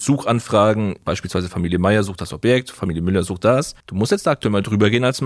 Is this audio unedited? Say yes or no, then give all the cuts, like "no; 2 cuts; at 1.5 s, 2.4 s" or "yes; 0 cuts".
no; 1 cut; at 3.8 s